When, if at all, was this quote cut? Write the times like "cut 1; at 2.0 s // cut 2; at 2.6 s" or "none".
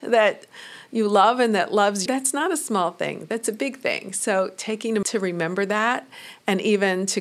cut 1; at 2.1 s // cut 2; at 5.0 s